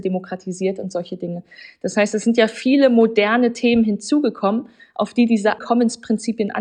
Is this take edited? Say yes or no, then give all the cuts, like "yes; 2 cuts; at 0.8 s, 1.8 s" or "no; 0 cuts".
yes; 1 cut; at 5.6 s